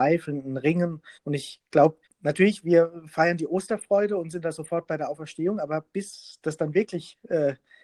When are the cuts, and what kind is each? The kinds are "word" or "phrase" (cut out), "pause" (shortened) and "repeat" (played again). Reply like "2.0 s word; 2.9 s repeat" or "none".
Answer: 1.1 s pause; 2.0 s pause